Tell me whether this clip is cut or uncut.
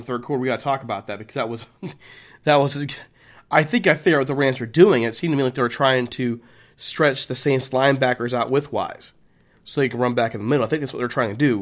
uncut